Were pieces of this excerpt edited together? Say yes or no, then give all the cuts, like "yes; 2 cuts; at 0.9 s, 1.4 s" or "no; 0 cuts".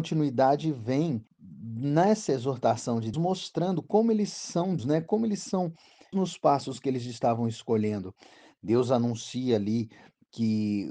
yes; 4 cuts; at 1.3 s, 3.1 s, 4.8 s, 6.1 s